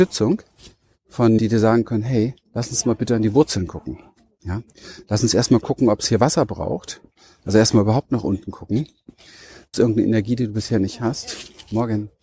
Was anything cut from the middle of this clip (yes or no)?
yes